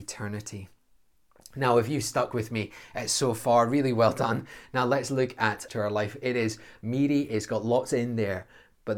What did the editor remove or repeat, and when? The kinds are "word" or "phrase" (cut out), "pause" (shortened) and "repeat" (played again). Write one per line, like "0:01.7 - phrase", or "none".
0:05.7 - phrase